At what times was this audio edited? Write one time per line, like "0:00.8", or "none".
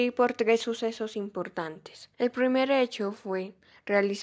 0:02.1